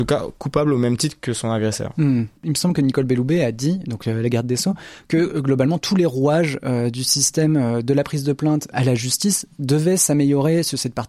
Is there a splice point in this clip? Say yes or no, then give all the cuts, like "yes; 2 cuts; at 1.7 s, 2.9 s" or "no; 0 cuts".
yes; 1 cut; at 2.4 s